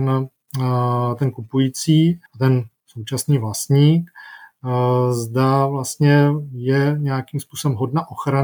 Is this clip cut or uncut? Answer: cut